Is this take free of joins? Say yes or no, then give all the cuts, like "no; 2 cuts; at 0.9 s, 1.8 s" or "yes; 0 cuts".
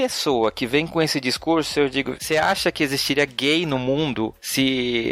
no; 1 cut; at 2.2 s